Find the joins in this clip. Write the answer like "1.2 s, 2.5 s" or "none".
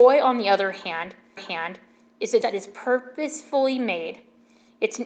1.4 s, 2.4 s